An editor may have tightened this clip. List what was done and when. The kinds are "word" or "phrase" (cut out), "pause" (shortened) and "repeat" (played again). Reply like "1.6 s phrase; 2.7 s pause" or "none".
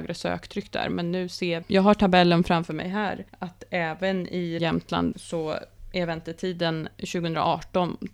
1.6 s phrase; 3.3 s pause; 4.6 s word; 5.1 s word